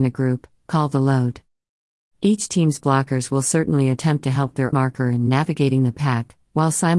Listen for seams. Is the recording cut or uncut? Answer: cut